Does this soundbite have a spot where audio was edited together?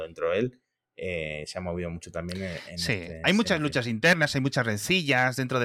no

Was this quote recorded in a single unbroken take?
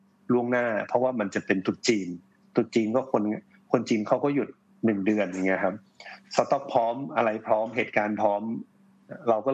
yes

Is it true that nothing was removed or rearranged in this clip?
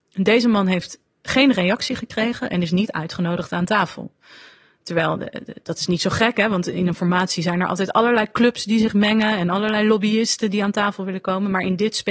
yes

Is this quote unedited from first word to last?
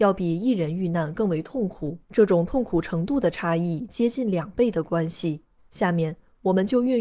no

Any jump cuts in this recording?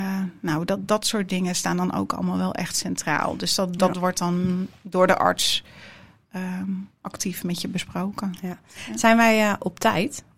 no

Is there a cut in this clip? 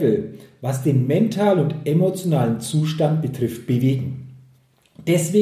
no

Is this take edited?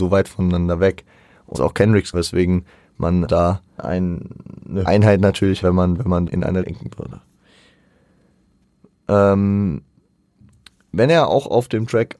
yes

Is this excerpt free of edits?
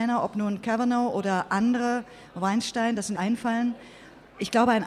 no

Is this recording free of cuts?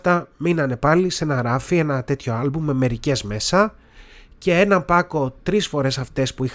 yes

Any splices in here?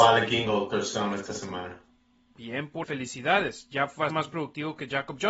yes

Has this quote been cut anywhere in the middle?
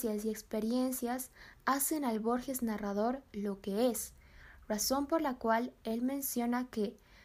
no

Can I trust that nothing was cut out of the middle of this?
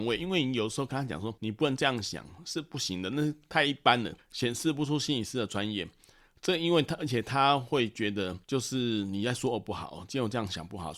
no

